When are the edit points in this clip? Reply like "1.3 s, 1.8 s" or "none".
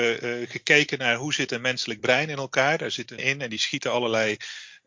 3.2 s